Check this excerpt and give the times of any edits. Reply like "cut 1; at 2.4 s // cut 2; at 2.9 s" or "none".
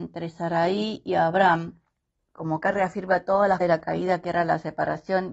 cut 1; at 2.2 s // cut 2; at 2.6 s // cut 3; at 3.6 s

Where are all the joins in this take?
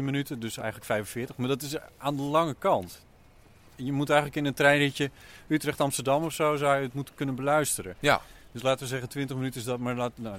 none

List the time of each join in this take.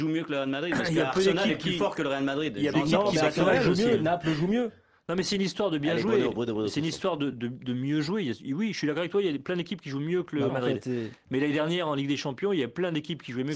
cut 1; at 2.7 s // cut 2; at 7.3 s // cut 3; at 10.5 s

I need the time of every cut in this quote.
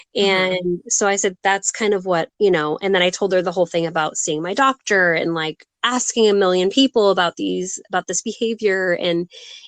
cut 1; at 2.3 s

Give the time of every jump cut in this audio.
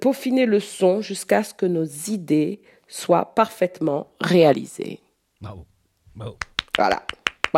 none

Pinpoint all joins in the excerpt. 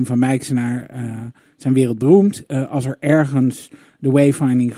none

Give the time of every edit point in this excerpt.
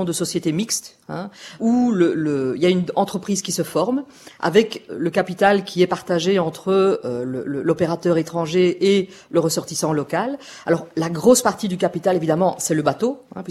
cut 1; at 1.6 s // cut 2; at 4.9 s

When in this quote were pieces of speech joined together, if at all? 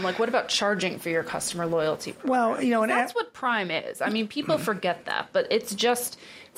none

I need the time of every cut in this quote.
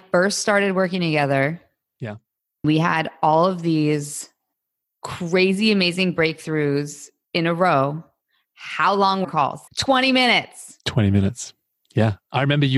cut 1; at 2.6 s // cut 2; at 9.2 s // cut 3; at 9.7 s

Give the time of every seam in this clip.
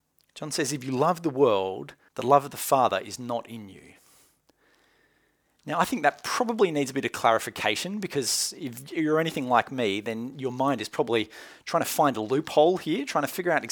cut 1; at 2.1 s

